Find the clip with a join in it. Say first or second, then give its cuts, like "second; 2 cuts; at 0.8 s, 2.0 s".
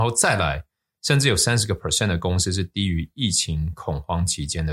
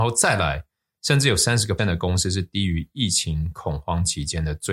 second; 1 cut; at 1.8 s